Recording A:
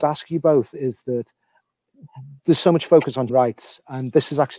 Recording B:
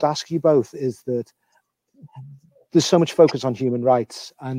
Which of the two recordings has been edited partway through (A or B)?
A